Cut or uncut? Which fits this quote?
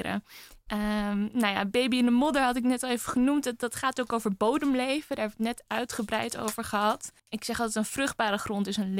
cut